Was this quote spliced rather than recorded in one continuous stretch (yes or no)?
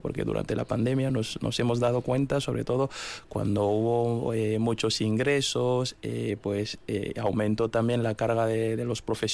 no